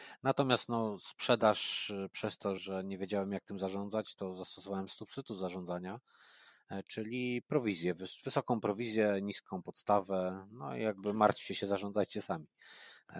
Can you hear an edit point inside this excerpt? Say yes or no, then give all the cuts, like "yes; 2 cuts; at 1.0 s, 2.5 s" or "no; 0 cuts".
yes; 1 cut; at 2.6 s